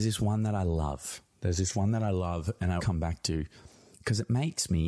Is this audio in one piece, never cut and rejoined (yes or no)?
no